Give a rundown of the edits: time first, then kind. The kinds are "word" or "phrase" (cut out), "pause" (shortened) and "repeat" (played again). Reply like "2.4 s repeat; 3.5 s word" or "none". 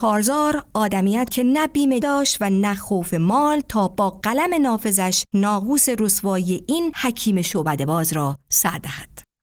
1.3 s word; 2.0 s word; 5.3 s pause